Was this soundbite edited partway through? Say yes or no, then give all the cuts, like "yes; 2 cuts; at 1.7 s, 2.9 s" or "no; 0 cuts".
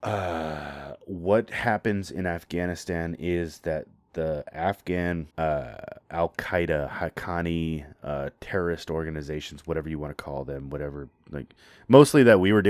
yes; 1 cut; at 5.3 s